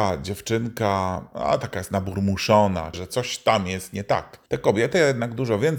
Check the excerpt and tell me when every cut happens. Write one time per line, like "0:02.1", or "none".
0:02.9
0:04.5